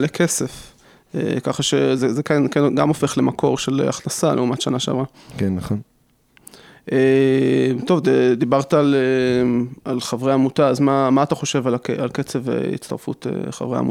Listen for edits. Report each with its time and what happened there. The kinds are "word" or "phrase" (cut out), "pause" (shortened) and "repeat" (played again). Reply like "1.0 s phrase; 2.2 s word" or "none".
none

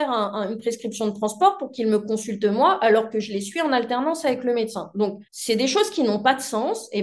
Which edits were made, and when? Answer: 5.3 s pause

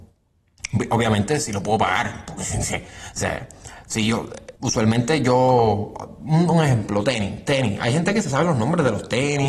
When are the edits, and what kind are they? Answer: 4.6 s pause

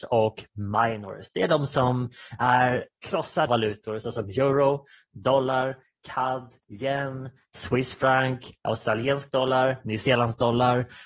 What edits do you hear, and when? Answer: 3.5 s phrase; 6.6 s pause

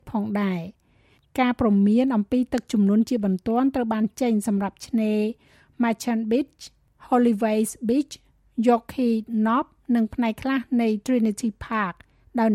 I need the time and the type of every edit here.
none

